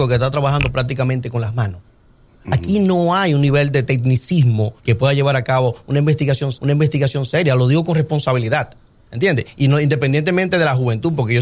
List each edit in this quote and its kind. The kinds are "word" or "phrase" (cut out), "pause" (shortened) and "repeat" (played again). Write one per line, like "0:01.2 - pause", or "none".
0:04.8 - pause
0:06.5 - repeat